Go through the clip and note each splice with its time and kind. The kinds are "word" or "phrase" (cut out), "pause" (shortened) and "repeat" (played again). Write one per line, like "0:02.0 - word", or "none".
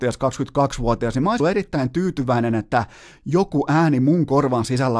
0:01.4 - word